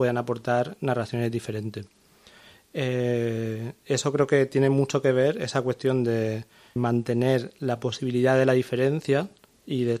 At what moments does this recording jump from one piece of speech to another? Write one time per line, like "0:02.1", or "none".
0:06.8